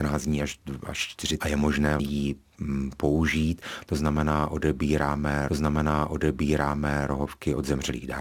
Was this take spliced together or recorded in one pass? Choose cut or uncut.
cut